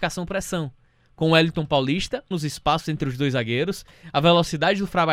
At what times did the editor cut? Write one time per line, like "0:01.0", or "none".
0:02.3